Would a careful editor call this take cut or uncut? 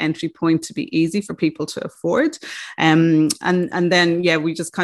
uncut